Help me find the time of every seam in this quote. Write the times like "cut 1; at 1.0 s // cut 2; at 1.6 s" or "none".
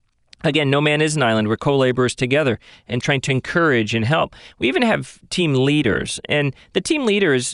cut 1; at 3.0 s